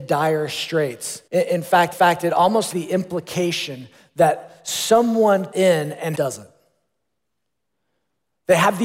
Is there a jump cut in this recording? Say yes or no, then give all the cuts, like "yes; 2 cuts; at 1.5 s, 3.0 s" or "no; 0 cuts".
yes; 5 cuts; at 1.3 s, 1.9 s, 2.7 s, 5.5 s, 6.1 s